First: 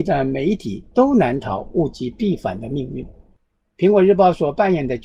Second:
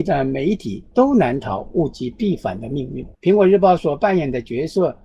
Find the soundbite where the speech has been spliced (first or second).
second